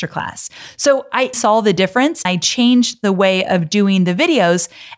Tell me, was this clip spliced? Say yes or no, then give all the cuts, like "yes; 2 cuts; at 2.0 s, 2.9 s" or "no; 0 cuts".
yes; 2 cuts; at 1.3 s, 2.3 s